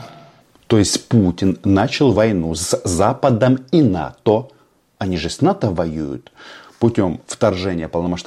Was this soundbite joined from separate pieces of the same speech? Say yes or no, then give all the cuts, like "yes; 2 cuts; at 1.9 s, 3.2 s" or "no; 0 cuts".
no; 0 cuts